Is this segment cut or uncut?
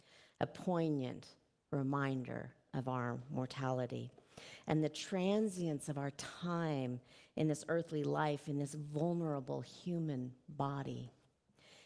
uncut